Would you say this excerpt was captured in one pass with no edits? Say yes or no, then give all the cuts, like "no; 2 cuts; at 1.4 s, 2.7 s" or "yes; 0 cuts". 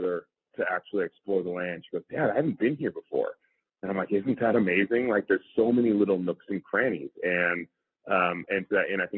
yes; 0 cuts